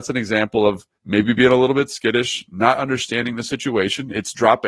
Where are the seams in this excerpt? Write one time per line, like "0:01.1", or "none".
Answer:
0:01.0